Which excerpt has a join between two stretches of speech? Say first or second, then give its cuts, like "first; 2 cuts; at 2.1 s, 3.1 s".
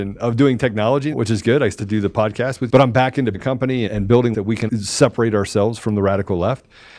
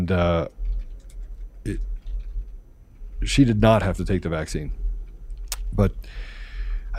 first; 7 cuts; at 1.1 s, 1.8 s, 2.7 s, 3.3 s, 3.9 s, 4.3 s, 4.7 s